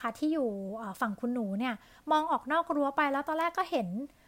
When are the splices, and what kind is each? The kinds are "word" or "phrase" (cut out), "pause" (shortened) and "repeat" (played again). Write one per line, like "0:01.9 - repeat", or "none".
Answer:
none